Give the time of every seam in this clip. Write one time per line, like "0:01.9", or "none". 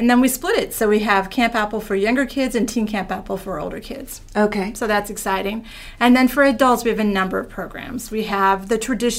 none